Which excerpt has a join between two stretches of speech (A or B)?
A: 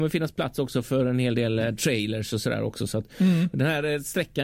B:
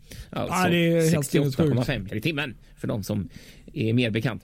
B